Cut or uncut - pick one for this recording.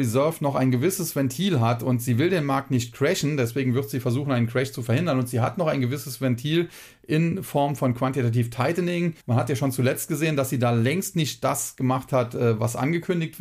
cut